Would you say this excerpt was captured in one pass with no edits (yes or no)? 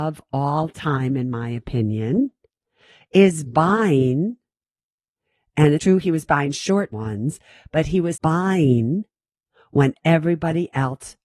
no